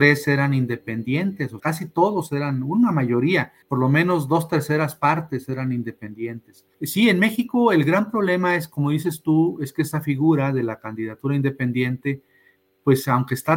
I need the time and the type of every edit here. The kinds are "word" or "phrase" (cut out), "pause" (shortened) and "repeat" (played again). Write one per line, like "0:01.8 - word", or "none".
0:01.6 - word
0:03.6 - pause
0:06.7 - pause